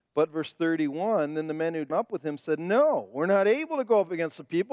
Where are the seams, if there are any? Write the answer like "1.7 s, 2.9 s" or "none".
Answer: 1.9 s